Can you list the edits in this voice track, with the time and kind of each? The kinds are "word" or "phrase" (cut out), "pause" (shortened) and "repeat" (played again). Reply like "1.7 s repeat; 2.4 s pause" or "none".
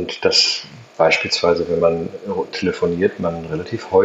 none